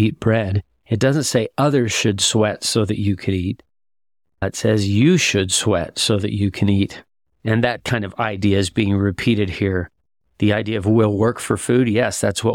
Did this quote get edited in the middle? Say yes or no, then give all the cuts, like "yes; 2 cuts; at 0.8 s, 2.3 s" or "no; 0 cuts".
no; 0 cuts